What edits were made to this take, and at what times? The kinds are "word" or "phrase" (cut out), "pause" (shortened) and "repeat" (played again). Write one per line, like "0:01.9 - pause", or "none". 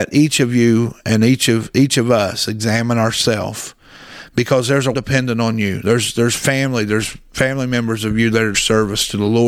0:04.9 - word
0:08.5 - phrase